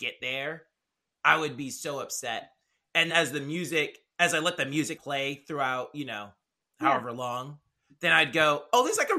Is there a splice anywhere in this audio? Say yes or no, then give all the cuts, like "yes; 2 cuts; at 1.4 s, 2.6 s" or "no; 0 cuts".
yes; 2 cuts; at 3.1 s, 5.0 s